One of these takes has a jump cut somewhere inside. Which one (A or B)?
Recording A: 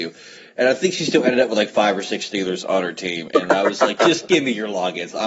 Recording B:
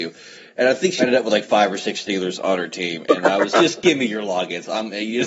B